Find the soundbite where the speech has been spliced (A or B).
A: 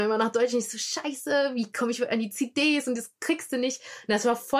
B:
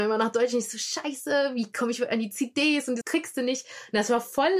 B